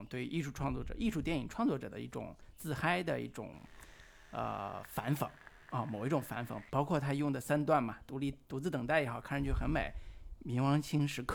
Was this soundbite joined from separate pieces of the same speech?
no; 0 cuts

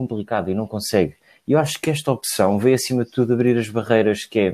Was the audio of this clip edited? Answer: no; 0 cuts

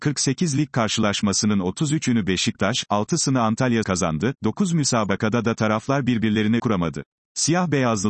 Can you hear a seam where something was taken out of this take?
yes; 3 cuts; at 3.8 s, 6.6 s, 7.2 s

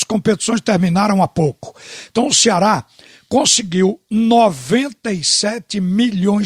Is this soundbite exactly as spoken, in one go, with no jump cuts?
yes; 0 cuts

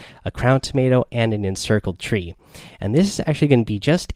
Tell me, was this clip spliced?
no; 0 cuts

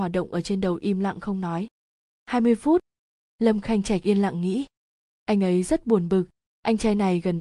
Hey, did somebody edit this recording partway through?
no; 0 cuts

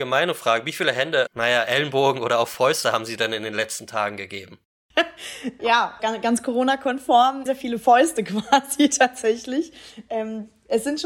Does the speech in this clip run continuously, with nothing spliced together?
no; 4 cuts; at 1.3 s, 5.6 s, 6.0 s, 7.5 s

